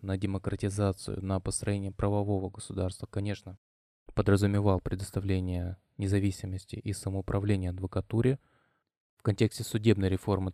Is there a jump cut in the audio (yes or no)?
no